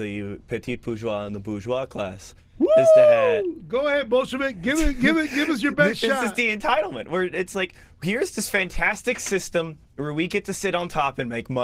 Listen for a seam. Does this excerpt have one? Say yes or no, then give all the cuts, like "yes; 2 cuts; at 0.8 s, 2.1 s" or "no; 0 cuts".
no; 0 cuts